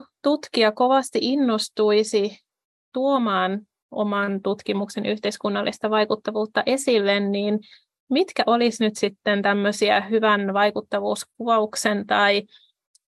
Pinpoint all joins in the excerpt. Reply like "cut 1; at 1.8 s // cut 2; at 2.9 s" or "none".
none